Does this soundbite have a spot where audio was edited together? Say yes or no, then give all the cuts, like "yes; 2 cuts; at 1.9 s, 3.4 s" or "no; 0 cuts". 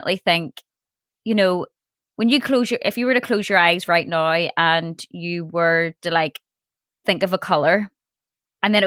no; 0 cuts